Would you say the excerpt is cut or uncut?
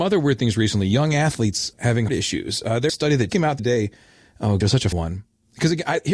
cut